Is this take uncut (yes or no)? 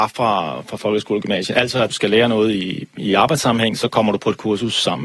no